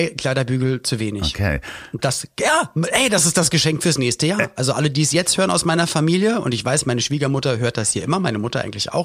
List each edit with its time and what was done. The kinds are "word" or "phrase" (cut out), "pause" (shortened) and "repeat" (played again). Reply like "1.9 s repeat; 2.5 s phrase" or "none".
none